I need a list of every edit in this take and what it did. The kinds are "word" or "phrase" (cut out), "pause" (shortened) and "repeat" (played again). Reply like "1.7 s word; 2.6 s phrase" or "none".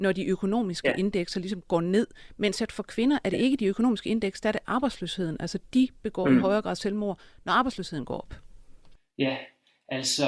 none